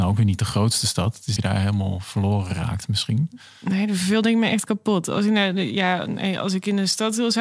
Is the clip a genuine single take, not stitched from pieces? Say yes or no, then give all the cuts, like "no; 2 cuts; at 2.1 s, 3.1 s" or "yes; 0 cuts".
no; 1 cut; at 1.4 s